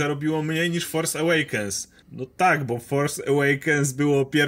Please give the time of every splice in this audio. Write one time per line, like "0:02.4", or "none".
0:02.0